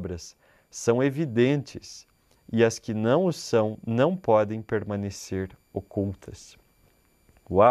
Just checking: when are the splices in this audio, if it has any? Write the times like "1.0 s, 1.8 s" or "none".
none